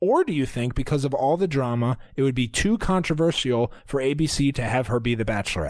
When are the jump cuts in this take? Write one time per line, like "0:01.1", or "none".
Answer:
none